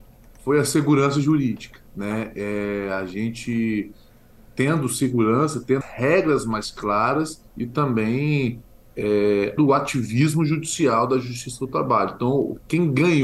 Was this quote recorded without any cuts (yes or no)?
no